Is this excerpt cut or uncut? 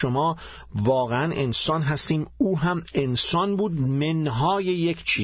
uncut